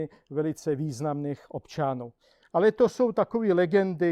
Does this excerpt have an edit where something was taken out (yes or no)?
no